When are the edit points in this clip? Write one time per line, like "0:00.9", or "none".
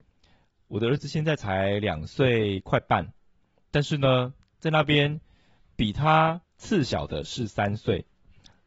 0:06.4